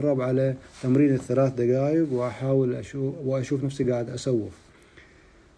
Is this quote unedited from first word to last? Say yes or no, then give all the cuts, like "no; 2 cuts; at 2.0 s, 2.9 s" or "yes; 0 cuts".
yes; 0 cuts